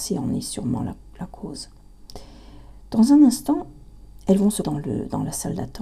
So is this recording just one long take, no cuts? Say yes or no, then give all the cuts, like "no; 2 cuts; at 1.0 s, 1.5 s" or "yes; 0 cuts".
no; 1 cut; at 4.6 s